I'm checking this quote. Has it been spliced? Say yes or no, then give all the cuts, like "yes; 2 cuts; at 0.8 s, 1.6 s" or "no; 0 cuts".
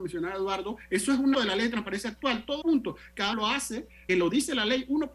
yes; 4 cuts; at 1.3 s, 2.6 s, 3.3 s, 4.1 s